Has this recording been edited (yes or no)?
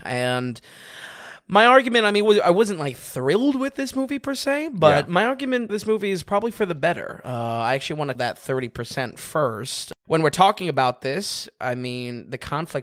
yes